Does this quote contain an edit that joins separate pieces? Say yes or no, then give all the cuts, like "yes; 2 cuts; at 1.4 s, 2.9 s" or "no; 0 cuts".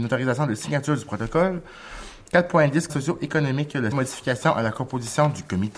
yes; 2 cuts; at 2.9 s, 3.9 s